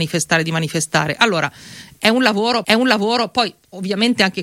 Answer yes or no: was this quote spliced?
yes